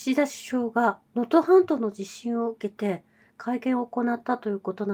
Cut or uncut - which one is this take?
cut